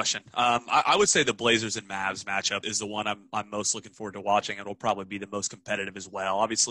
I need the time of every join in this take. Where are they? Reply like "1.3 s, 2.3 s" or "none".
2.6 s